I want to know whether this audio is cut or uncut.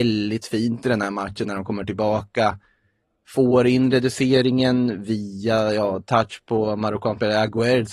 uncut